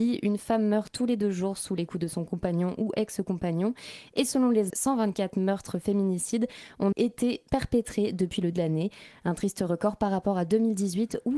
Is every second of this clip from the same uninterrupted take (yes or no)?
no